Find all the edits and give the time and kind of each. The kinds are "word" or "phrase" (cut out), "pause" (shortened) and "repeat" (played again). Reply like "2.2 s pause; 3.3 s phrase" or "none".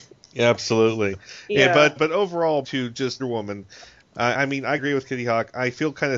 2.0 s word; 2.6 s word; 3.2 s word; 4.3 s word; 4.8 s word